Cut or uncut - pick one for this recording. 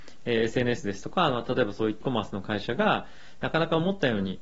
cut